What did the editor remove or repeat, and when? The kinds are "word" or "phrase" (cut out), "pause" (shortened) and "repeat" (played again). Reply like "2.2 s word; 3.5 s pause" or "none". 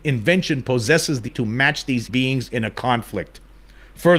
1.3 s word; 2.1 s word